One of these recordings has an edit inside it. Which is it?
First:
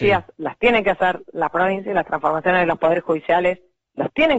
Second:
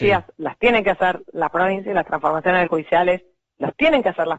second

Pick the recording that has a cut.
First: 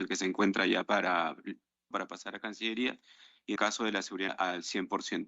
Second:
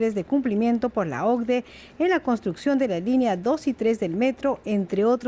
first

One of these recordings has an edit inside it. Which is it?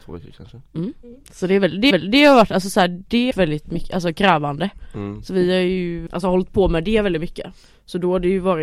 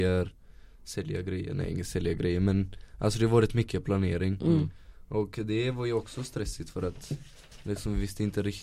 first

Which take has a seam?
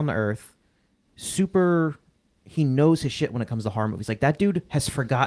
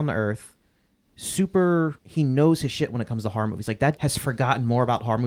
second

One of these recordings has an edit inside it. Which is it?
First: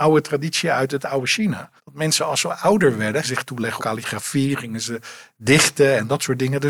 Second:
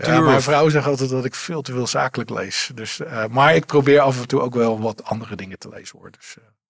first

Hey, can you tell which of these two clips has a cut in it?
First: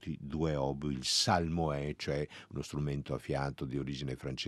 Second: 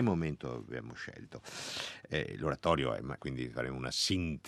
second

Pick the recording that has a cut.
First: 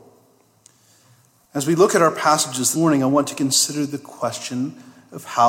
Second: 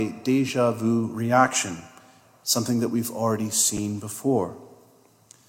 first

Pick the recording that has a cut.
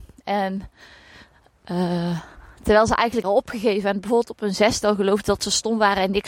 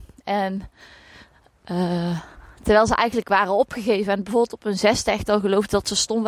first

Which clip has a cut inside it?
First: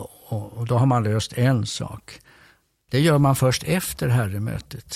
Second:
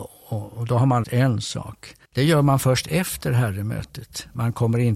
second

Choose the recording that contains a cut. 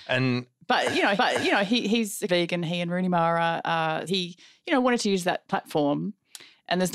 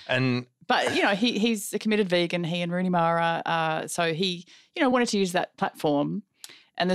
first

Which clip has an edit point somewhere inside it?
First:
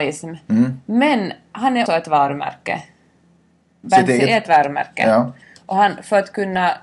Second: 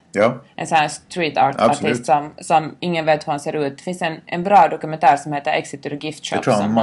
first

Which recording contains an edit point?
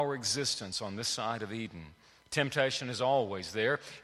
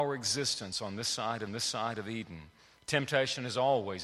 second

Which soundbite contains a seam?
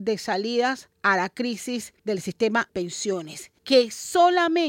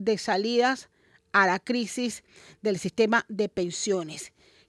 first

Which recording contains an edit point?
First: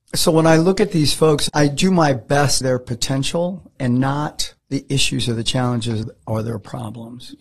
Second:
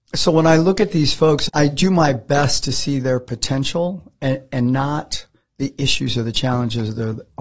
first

